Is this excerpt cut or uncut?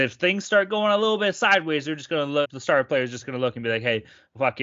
cut